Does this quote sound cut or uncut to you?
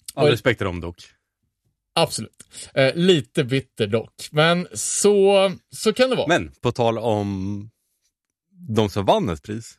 uncut